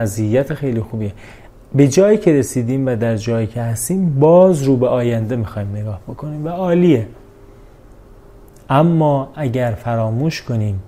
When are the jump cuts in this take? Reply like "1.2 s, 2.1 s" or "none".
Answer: none